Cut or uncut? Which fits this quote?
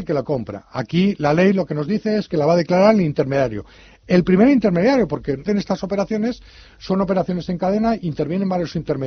cut